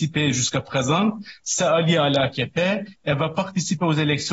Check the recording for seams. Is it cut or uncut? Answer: uncut